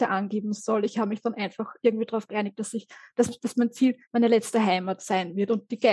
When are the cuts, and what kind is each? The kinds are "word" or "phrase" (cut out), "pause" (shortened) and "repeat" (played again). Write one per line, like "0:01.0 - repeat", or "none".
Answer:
0:04.0 - pause

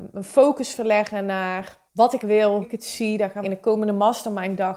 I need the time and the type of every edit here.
0:01.9 - pause
0:02.2 - word
0:02.6 - word
0:03.4 - word

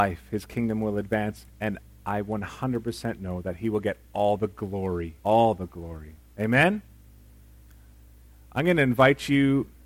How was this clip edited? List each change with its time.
0:01.5 - pause
0:05.2 - pause

